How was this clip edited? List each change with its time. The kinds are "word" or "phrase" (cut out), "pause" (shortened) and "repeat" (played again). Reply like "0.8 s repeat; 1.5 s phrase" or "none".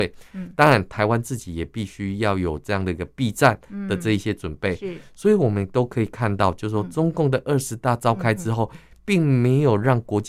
none